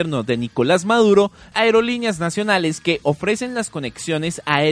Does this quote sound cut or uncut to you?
cut